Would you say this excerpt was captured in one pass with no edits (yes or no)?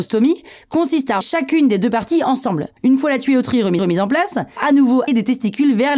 no